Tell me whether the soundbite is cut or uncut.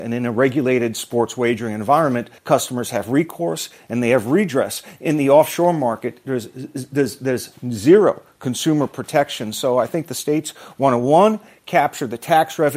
cut